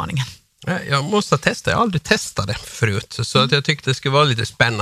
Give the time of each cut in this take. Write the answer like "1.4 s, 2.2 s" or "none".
3.8 s